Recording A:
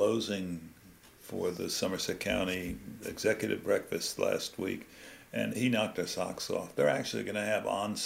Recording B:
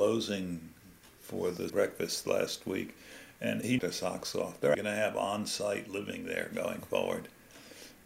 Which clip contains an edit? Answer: B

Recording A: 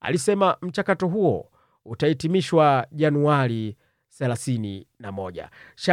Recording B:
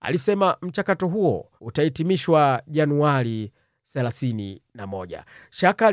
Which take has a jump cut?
B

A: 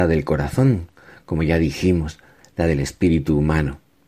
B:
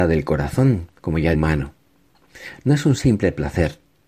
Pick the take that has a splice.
B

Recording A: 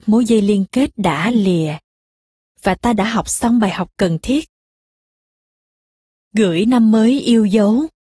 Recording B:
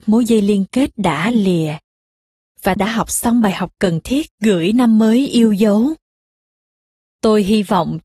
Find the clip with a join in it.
B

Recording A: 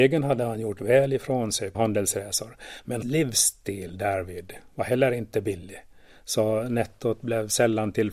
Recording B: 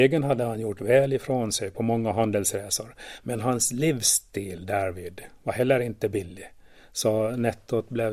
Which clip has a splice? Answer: A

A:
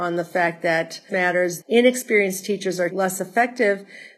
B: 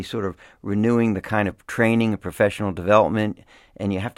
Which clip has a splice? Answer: A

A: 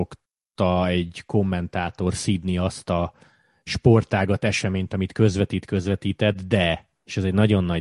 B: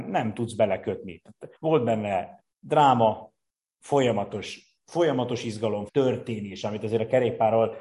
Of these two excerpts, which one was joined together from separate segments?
B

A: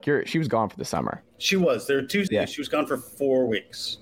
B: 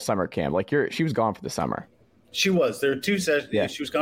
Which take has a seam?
A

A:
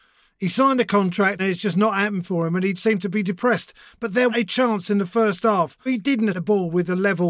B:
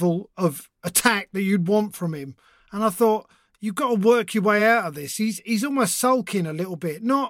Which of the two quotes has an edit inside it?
A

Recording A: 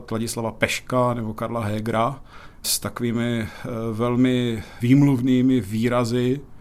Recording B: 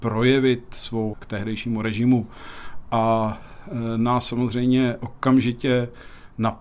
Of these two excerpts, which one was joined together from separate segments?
B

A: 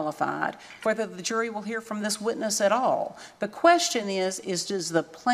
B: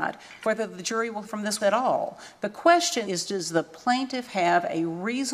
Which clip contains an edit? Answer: B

